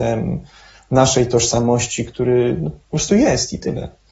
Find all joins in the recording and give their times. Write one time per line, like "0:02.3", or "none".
0:02.8